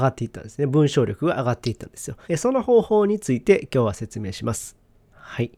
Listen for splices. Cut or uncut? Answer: cut